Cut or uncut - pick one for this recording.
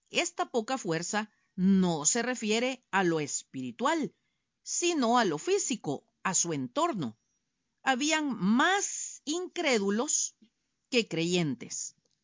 uncut